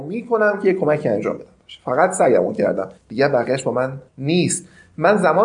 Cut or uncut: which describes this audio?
cut